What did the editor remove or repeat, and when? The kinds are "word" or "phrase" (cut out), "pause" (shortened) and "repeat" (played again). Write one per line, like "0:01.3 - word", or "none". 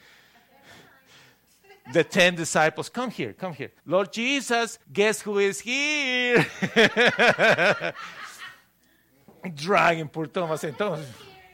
0:03.8 - pause
0:04.8 - pause